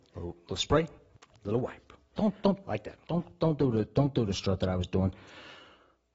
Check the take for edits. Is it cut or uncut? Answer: uncut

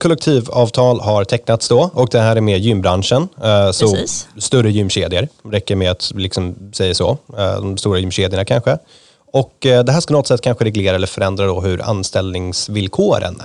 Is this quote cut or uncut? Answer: uncut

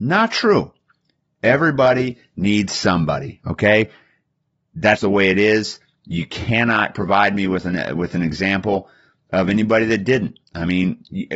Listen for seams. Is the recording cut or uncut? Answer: cut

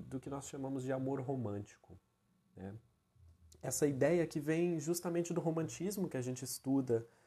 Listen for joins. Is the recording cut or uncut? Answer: uncut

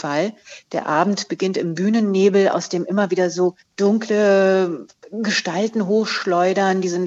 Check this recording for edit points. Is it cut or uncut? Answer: uncut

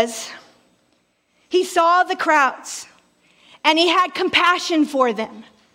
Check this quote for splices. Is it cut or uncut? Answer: uncut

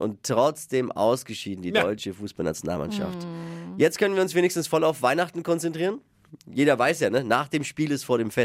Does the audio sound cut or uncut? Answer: uncut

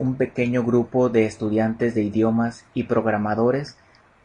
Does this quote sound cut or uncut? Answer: uncut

